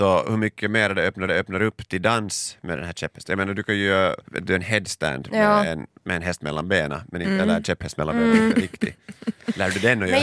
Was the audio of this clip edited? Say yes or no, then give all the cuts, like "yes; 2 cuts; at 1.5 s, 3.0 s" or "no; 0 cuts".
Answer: yes; 2 cuts; at 1.3 s, 4.3 s